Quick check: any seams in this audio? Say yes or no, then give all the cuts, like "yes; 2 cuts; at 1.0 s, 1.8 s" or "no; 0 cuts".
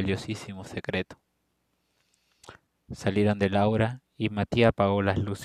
no; 0 cuts